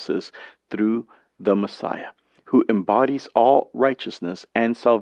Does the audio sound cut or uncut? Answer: uncut